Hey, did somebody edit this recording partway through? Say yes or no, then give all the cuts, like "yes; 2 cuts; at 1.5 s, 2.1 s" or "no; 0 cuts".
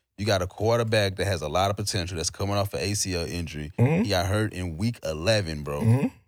no; 0 cuts